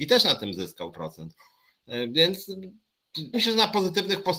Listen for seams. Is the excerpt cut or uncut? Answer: cut